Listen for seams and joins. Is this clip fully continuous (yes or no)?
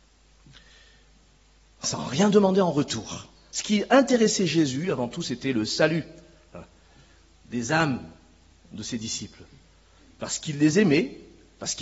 yes